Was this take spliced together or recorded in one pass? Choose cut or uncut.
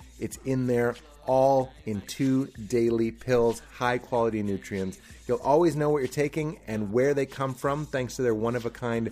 uncut